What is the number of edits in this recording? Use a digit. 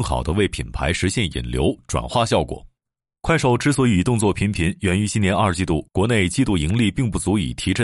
0